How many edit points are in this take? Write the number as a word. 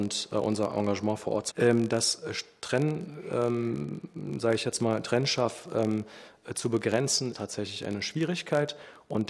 two